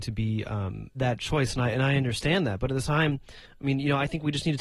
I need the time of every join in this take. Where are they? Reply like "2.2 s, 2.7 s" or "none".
0.9 s, 2.8 s